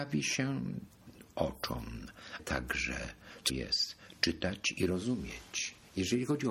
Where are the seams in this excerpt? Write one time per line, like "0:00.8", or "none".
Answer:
0:02.4
0:03.5